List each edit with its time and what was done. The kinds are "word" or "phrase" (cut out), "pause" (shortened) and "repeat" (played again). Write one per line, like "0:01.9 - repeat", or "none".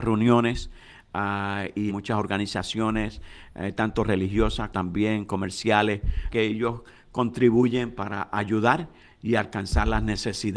0:01.9 - phrase
0:04.7 - word
0:06.3 - phrase

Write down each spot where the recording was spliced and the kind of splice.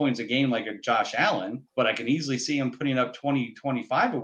0:01.7 - pause

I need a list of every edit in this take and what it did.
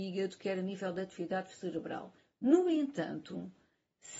0:02.2 - pause

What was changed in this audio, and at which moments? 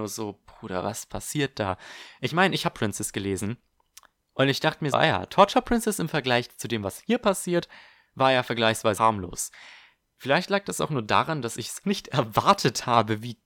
0:02.7 - word
0:04.9 - word
0:09.0 - word
0:11.8 - word

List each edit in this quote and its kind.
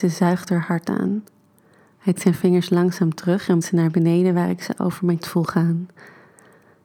0:02.1 - word
0:03.6 - word
0:05.2 - word

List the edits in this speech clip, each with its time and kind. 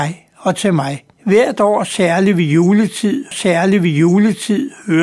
0:01.1 - pause
0:03.3 - repeat

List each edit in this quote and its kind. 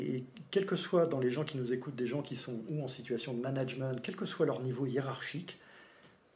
none

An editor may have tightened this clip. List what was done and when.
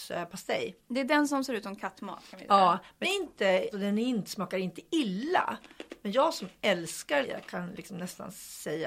0:03.0 - word
0:03.7 - word
0:07.2 - word

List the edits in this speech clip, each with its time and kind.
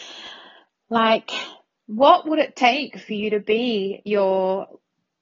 0:01.8 - pause

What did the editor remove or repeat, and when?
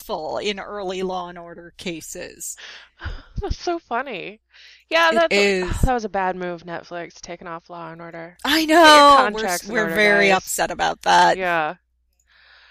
none

